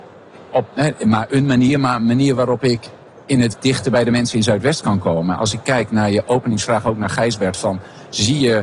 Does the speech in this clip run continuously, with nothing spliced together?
no; 1 cut; at 3.5 s

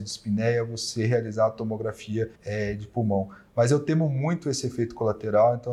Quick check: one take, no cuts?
no; 1 cut; at 2.3 s

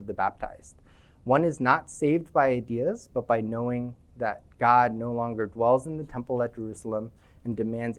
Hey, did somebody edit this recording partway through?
no; 0 cuts

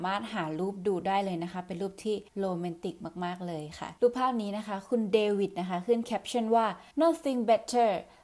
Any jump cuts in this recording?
yes; 3 cuts; at 2.3 s, 4.0 s, 6.9 s

